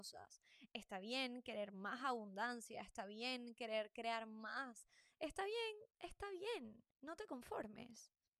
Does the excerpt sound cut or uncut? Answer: cut